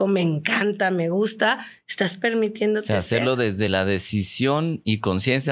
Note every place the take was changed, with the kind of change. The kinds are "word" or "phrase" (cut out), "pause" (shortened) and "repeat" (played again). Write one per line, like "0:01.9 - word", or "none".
none